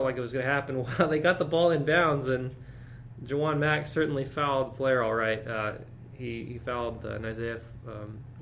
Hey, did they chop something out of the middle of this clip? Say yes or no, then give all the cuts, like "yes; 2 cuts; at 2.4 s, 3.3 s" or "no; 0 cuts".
no; 0 cuts